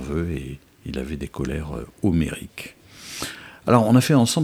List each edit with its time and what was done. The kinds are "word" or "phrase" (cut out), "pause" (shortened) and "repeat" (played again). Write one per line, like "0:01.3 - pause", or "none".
none